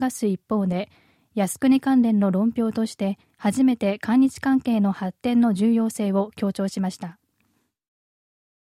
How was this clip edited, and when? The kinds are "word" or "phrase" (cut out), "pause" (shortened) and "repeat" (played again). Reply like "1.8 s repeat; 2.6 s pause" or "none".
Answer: none